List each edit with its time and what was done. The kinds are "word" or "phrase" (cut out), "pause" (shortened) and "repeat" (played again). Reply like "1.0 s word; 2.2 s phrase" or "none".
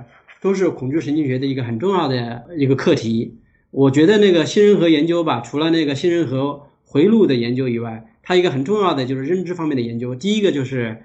none